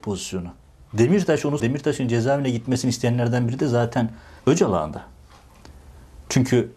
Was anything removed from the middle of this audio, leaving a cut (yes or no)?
yes